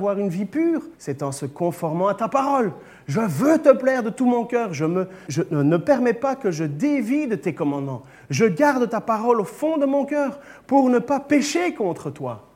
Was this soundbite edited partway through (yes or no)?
yes